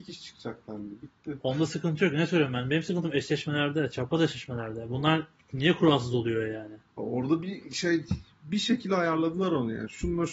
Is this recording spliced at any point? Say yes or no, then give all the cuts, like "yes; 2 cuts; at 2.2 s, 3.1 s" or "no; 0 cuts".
no; 0 cuts